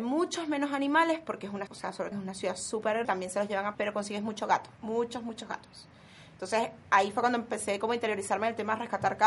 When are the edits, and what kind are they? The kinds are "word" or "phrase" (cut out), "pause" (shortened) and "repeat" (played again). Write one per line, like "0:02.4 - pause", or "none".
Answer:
0:01.7 - word
0:02.1 - phrase
0:03.0 - word
0:03.7 - word
0:04.7 - pause